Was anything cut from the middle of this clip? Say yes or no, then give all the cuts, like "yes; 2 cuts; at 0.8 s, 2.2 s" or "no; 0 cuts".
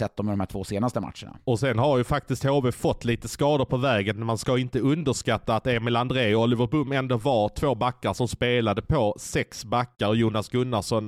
yes; 1 cut; at 1.4 s